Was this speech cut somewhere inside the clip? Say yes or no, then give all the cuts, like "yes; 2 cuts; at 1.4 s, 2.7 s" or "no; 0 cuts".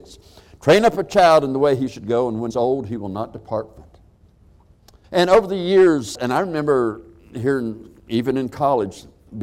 yes; 5 cuts; at 2.5 s, 3.8 s, 5.0 s, 6.1 s, 8.0 s